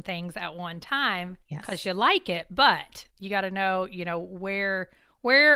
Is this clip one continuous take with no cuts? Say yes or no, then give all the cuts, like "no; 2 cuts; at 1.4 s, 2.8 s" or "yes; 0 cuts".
no; 2 cuts; at 1.4 s, 3.1 s